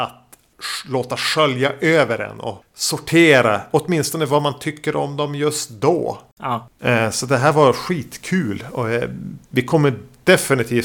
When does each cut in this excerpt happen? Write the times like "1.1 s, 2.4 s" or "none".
9.4 s